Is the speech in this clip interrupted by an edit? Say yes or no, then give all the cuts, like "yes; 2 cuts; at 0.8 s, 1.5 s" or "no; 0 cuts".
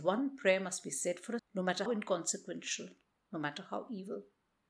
yes; 2 cuts; at 1.4 s, 1.9 s